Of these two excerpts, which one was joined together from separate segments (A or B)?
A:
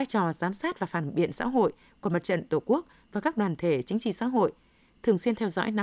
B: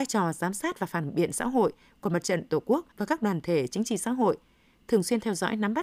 B